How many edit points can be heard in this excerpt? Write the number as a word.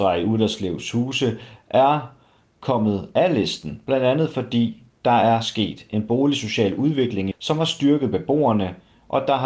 one